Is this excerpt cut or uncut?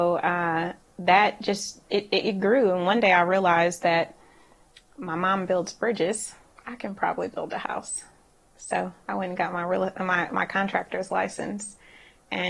uncut